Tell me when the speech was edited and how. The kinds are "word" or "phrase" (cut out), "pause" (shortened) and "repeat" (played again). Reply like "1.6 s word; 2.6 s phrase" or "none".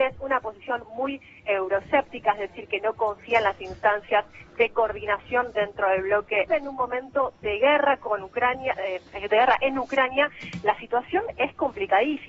6.5 s phrase; 7.3 s pause